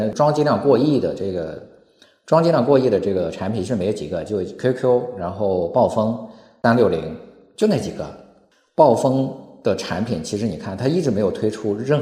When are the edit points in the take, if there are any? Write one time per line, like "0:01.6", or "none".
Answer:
none